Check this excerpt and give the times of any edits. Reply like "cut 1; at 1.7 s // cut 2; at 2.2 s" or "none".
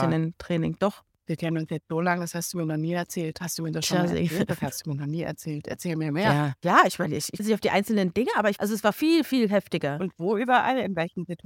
cut 1; at 7.4 s // cut 2; at 8.6 s // cut 3; at 8.9 s